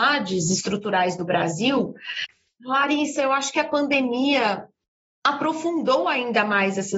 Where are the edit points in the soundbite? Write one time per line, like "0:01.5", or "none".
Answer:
none